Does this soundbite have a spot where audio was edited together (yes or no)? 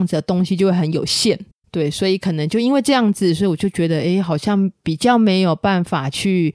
no